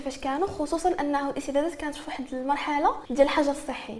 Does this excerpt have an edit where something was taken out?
yes; 1 cut; at 3.0 s

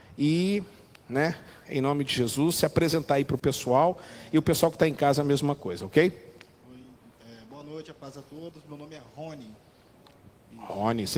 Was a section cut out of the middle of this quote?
no; 0 cuts

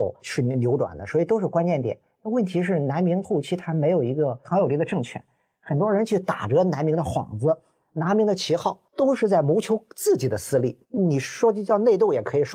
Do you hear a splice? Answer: yes; 1 cut; at 10.8 s

